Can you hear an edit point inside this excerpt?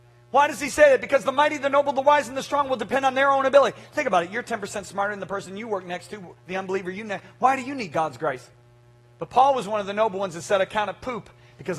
no; 0 cuts

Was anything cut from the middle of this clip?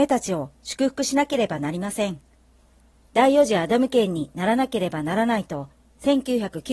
no; 0 cuts

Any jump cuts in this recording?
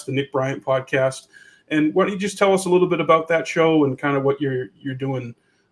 no; 0 cuts

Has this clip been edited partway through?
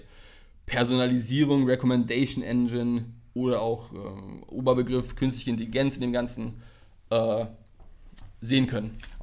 no; 0 cuts

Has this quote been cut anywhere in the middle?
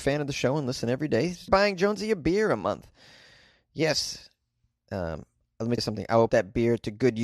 yes; 3 cuts; at 1.5 s, 5.8 s, 6.3 s

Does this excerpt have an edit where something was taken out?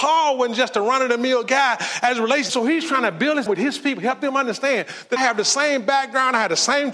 yes; 3 cuts; at 2.5 s, 3.5 s, 5.2 s

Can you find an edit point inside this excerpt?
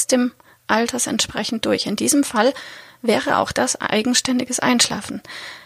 no; 0 cuts

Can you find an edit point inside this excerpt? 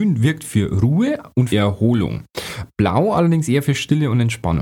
yes; 1 cut; at 1.5 s

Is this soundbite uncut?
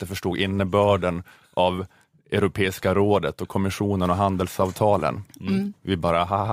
yes; 0 cuts

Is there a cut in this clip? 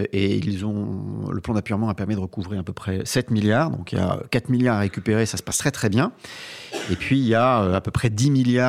no; 0 cuts

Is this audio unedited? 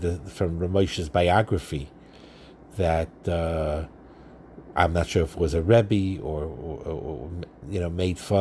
yes; 0 cuts

